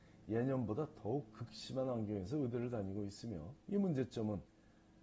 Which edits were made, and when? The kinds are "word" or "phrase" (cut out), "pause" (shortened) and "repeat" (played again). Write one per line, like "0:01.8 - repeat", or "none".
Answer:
0:03.6 - pause